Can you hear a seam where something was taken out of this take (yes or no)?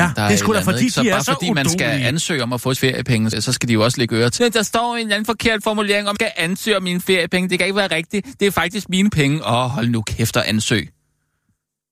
yes